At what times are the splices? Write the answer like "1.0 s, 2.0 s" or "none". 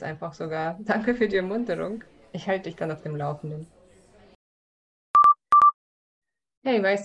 none